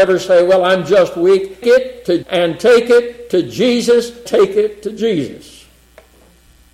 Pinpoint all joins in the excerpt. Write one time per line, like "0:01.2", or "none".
0:01.6
0:02.2
0:04.3